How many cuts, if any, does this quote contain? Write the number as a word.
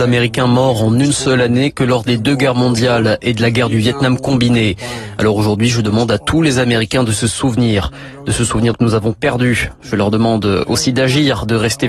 one